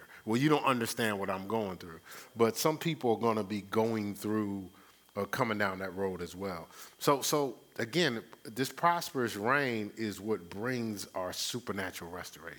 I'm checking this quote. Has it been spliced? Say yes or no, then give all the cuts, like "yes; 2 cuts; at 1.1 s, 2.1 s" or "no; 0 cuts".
no; 0 cuts